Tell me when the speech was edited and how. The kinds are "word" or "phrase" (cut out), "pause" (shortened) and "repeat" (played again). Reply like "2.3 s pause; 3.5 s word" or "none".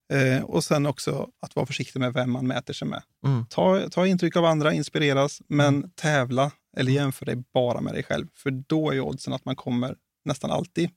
none